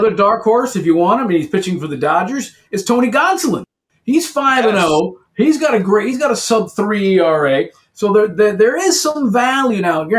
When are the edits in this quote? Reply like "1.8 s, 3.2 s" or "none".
none